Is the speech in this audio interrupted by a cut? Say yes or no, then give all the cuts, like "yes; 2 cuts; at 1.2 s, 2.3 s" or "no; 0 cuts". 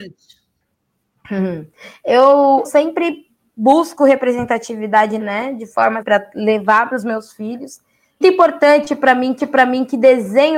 yes; 6 cuts; at 2.6 s, 5.2 s, 6.0 s, 6.9 s, 8.2 s, 9.4 s